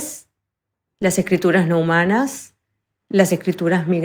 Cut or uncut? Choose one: uncut